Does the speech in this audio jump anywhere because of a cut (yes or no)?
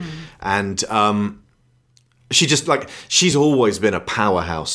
no